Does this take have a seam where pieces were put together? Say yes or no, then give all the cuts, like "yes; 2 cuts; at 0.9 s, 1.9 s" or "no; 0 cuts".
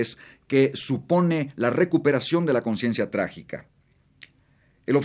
no; 0 cuts